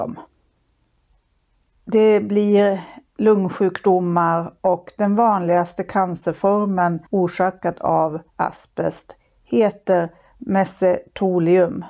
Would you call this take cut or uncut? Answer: cut